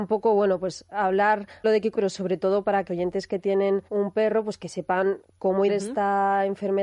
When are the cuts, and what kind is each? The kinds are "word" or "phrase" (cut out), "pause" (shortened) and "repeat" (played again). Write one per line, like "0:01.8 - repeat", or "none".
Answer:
0:01.6 - phrase
0:01.9 - word
0:02.9 - word
0:03.9 - pause
0:05.7 - word